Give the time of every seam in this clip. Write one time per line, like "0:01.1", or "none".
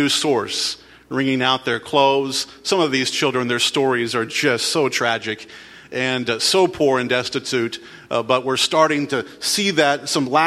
none